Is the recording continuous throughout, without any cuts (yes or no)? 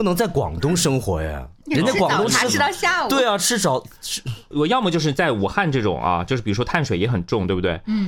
yes